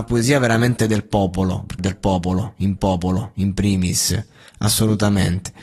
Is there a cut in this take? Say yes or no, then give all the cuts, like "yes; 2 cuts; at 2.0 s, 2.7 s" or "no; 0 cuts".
yes; 2 cuts; at 1.8 s, 2.8 s